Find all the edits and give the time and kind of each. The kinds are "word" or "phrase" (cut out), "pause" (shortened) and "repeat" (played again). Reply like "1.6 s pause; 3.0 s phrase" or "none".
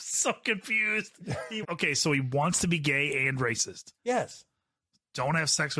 1.6 s word; 4.0 s pause